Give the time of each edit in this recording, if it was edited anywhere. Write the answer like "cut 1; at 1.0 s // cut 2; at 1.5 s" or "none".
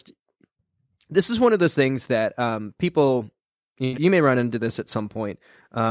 cut 1; at 3.9 s